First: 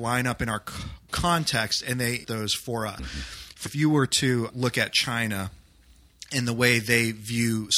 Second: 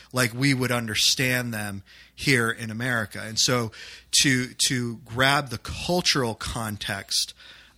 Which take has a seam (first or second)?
first